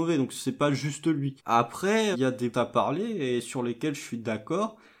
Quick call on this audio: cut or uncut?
cut